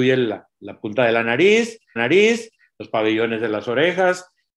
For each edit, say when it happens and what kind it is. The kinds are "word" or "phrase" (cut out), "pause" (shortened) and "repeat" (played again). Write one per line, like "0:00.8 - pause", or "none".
0:02.0 - repeat